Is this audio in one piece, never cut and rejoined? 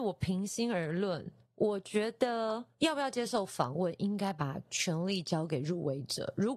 yes; 0 cuts

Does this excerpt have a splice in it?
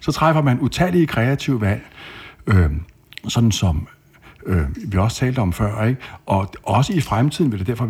no; 0 cuts

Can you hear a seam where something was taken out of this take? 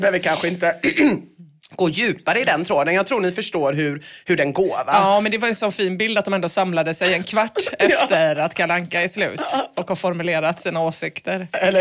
no; 0 cuts

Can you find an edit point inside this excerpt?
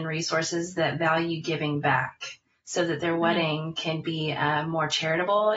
no; 0 cuts

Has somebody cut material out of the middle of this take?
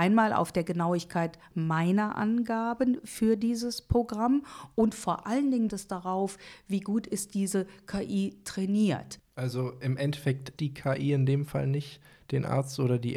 yes; 3 cuts; at 5.7 s, 9.3 s, 10.6 s

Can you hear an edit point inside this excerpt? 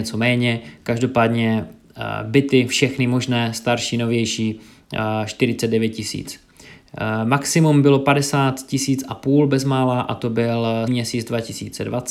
yes; 1 cut; at 10.9 s

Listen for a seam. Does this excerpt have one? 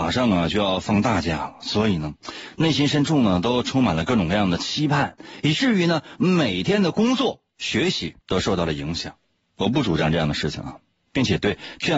yes; 3 cuts; at 7.5 s, 8.2 s, 9.4 s

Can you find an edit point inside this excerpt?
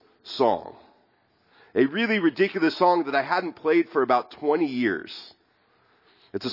no; 0 cuts

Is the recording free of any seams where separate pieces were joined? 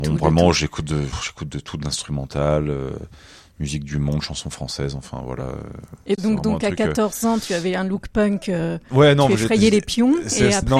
yes; 0 cuts

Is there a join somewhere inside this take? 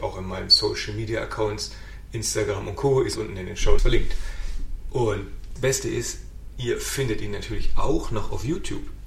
yes; 3 cuts; at 3.2 s, 3.8 s, 5.6 s

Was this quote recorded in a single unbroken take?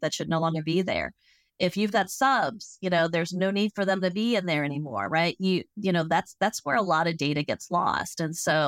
yes; 0 cuts

